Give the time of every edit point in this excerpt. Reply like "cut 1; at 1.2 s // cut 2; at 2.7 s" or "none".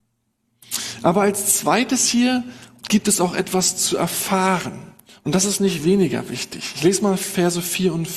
none